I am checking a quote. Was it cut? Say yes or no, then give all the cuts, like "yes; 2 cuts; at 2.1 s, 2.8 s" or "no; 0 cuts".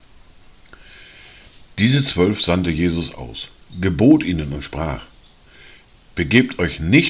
no; 0 cuts